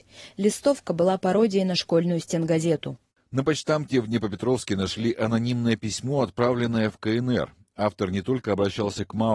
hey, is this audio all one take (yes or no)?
yes